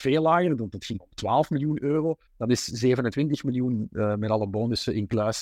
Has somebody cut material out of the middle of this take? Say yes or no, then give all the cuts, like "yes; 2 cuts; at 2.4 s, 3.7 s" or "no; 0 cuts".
yes; 1 cut; at 2.3 s